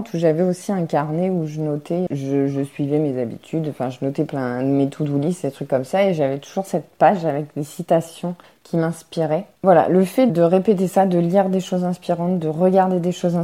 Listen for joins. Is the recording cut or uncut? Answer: cut